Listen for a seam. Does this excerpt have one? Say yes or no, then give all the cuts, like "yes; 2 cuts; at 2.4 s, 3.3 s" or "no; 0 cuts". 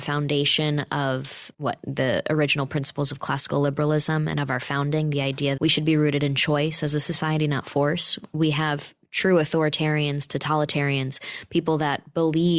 yes; 2 cuts; at 1.5 s, 5.6 s